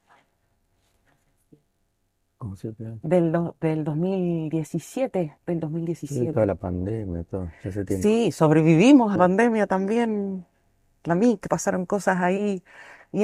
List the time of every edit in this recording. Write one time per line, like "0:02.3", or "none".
0:05.4
0:09.2
0:11.5